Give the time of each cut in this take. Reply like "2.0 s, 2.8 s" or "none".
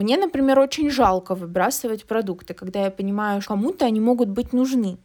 3.4 s